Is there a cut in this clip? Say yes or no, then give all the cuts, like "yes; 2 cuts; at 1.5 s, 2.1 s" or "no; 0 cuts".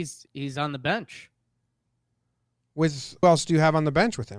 yes; 1 cut; at 3.2 s